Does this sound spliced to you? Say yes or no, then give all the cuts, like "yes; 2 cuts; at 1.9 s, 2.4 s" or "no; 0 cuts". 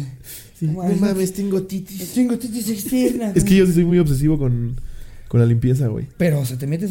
no; 0 cuts